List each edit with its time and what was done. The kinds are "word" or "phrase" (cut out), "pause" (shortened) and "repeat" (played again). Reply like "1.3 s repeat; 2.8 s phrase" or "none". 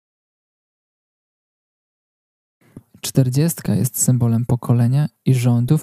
none

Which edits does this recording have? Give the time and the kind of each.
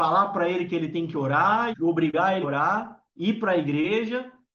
1.7 s word; 2.4 s word; 3.1 s pause

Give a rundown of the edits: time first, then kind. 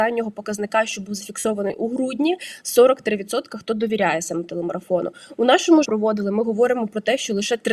5.8 s phrase

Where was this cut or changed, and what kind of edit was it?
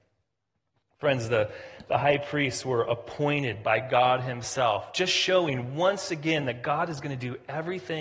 none

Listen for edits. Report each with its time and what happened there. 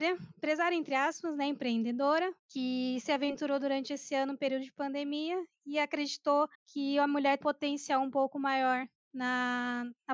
2.4 s pause; 6.5 s pause; 7.4 s word

